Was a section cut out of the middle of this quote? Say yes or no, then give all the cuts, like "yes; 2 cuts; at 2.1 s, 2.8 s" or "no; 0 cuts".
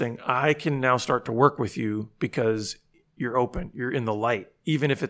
no; 0 cuts